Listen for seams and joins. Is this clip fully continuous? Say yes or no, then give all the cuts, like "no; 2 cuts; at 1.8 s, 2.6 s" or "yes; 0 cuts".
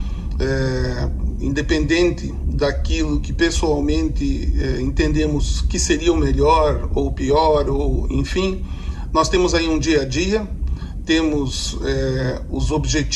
yes; 0 cuts